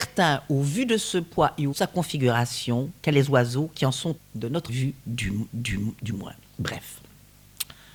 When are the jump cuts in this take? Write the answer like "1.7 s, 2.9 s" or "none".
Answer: 1.7 s, 3.1 s, 4.2 s, 4.7 s, 5.5 s